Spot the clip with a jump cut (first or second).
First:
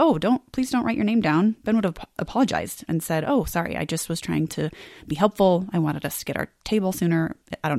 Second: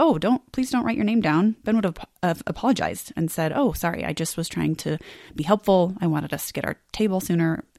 first